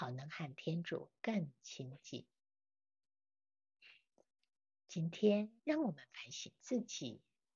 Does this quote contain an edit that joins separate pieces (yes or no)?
yes